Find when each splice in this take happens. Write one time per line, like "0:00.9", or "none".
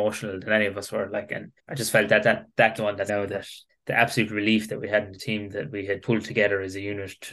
0:01.6
0:02.8
0:03.1
0:03.7
0:06.0